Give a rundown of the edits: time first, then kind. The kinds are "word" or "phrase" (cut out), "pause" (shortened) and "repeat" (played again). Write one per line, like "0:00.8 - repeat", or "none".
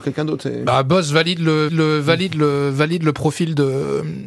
0:01.7 - repeat